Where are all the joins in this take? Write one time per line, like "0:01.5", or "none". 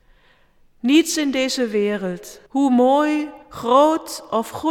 0:02.5
0:03.4